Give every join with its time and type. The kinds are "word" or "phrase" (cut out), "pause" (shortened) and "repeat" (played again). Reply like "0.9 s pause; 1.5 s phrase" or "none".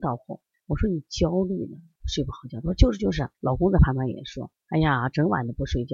3.3 s pause; 4.6 s pause